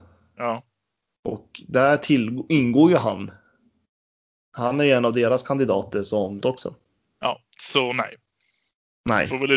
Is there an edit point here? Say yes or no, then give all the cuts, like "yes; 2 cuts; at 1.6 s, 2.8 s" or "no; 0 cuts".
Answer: yes; 2 cuts; at 6.4 s, 7.5 s